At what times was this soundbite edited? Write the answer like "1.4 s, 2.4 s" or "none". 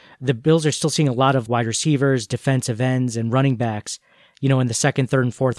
1.5 s